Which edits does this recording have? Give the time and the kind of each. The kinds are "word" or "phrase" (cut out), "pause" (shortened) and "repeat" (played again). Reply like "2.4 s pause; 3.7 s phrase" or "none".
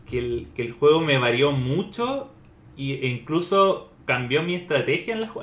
4.0 s pause